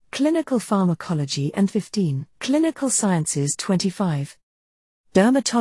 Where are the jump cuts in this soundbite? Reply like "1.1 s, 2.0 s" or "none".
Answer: 1.7 s, 2.3 s